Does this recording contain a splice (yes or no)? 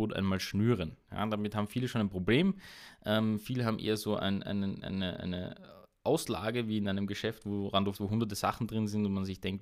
yes